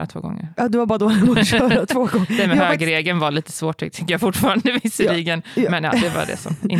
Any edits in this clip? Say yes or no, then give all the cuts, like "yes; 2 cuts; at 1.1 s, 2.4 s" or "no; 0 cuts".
no; 0 cuts